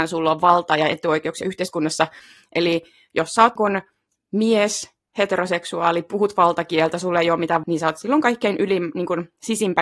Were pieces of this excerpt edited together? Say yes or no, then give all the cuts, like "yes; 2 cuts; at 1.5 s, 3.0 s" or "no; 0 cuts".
yes; 3 cuts; at 3.6 s, 5.0 s, 7.6 s